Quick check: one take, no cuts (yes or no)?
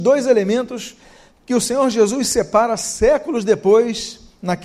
yes